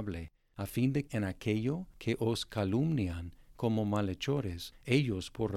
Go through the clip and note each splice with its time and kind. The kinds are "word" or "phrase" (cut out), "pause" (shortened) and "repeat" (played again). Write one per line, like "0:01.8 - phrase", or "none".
0:01.1 - word